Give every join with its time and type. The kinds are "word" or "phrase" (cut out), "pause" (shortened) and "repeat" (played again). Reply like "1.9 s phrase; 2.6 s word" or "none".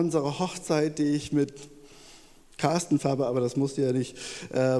3.0 s word